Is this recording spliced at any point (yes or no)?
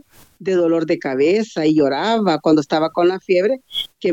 no